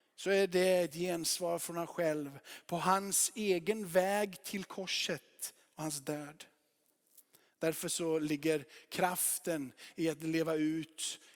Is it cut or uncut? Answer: uncut